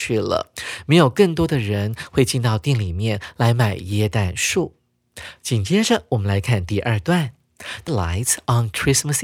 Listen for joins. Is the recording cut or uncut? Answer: cut